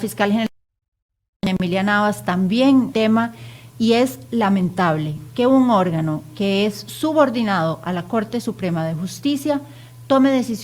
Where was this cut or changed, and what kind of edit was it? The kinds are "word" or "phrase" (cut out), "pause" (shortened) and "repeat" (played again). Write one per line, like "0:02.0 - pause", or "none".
0:02.9 - phrase